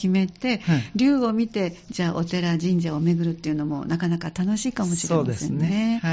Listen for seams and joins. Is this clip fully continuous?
yes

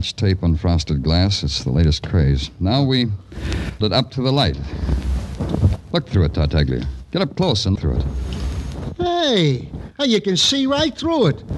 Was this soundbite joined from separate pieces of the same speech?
yes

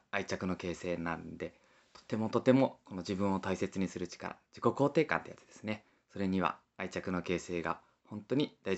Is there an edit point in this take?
no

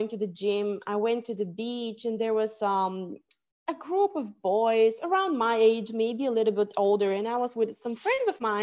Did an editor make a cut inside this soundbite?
no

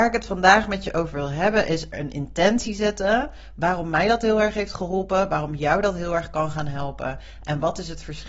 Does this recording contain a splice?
yes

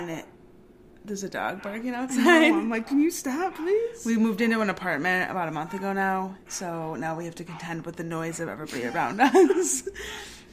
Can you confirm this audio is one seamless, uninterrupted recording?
no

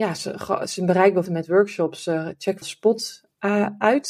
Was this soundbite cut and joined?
yes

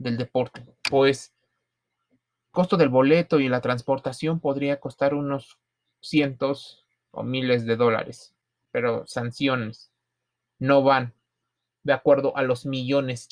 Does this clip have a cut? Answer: yes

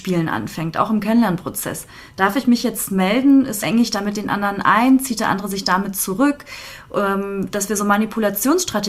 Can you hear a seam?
yes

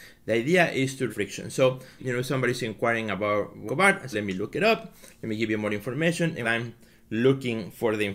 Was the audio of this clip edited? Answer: yes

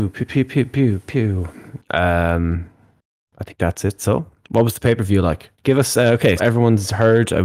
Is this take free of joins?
no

